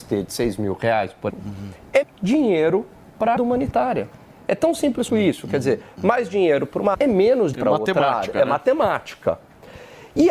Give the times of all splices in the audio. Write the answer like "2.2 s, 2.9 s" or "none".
1.3 s, 2.0 s, 3.4 s, 5.1 s, 6.9 s, 7.5 s